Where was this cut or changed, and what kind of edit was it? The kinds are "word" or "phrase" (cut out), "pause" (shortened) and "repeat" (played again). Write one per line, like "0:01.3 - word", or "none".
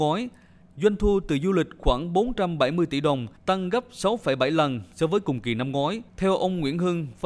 0:03.4 - pause
0:06.1 - pause